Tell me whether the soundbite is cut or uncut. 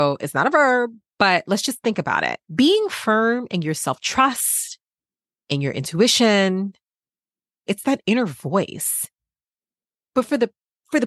cut